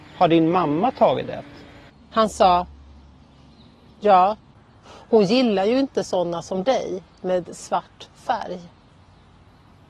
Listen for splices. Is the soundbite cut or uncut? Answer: uncut